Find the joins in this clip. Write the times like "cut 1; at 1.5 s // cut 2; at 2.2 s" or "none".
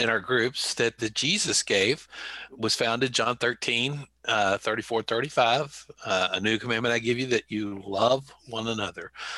cut 1; at 1.0 s // cut 2; at 2.5 s // cut 3; at 6.0 s